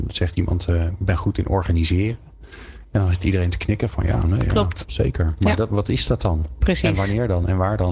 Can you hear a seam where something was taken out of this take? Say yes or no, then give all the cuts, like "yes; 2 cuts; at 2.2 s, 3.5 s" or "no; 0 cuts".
no; 0 cuts